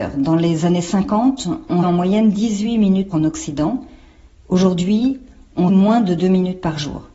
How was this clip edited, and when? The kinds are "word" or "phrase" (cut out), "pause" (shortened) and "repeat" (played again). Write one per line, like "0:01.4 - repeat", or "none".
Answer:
0:01.8 - word
0:03.1 - phrase
0:05.7 - word